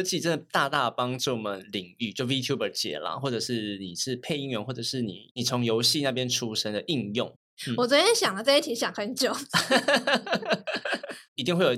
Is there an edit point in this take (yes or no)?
no